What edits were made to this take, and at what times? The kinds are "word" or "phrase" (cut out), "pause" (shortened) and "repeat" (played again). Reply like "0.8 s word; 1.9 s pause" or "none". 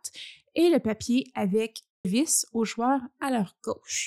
2.0 s word

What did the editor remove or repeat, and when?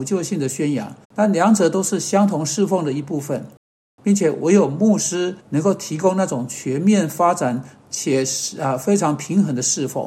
1.0 s pause; 5.4 s pause

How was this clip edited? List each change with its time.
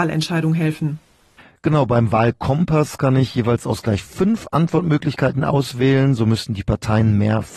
none

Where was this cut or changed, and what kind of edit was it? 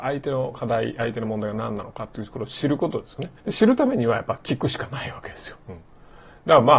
3.4 s pause; 5.6 s pause

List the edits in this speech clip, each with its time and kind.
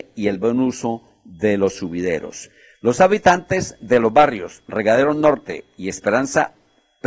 none

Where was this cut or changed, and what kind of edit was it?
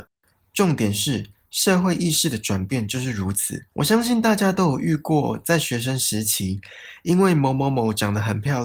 3.7 s pause

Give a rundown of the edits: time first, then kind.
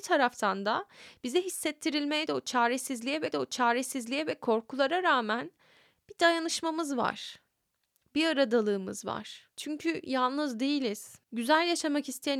2.3 s phrase; 3.3 s repeat; 9.5 s pause; 11.2 s pause

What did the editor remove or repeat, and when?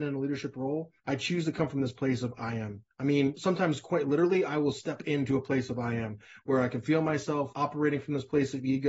1.0 s pause; 2.9 s pause

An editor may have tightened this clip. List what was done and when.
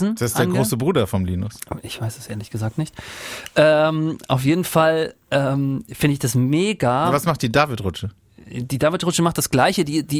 none

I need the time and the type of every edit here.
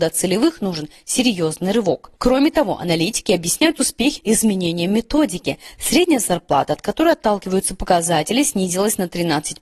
2.2 s pause; 4.2 s phrase

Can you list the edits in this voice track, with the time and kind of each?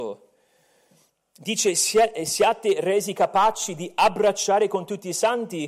none

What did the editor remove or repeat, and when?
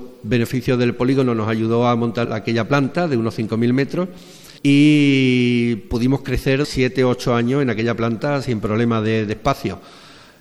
2.3 s word; 4.6 s pause; 6.6 s word

